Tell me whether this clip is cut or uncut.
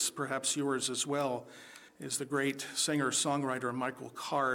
cut